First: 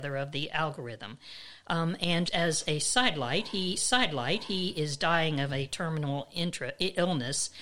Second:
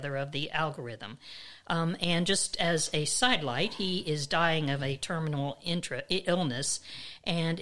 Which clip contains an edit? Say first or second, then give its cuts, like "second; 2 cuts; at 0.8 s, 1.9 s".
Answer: first; 2 cuts; at 2.3 s, 3.8 s